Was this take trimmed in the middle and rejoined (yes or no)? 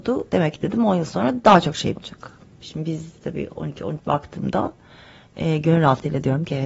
yes